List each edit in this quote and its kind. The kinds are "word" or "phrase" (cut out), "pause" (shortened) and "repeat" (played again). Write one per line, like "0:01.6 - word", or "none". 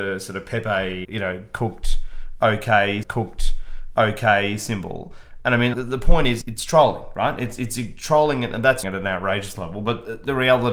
0:01.0 - word
0:03.0 - repeat
0:05.7 - word
0:06.4 - word
0:08.8 - word